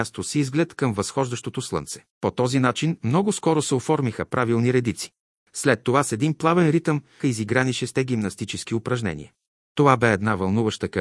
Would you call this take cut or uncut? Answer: cut